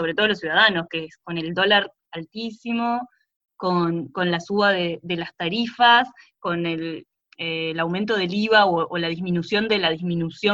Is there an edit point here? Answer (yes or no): no